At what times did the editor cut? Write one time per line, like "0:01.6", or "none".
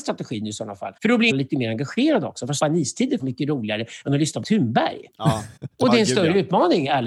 0:01.0
0:01.3
0:02.6
0:03.2
0:04.4
0:05.6